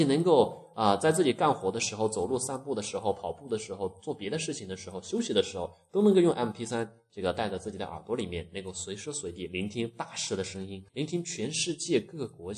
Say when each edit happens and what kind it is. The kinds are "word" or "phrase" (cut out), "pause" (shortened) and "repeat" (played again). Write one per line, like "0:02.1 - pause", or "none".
0:10.9 - pause